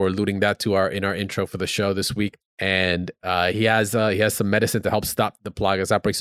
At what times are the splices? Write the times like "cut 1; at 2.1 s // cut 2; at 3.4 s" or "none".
cut 1; at 2.5 s